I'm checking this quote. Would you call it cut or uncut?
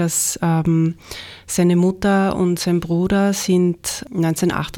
uncut